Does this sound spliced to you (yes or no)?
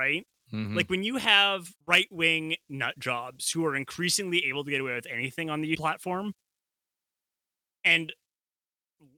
yes